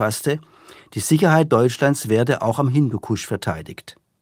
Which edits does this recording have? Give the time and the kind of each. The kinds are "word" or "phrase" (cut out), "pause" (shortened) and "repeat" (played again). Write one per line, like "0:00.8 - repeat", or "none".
none